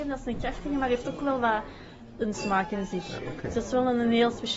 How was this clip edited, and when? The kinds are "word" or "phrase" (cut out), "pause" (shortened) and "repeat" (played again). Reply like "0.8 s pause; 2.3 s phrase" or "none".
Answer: 2.3 s word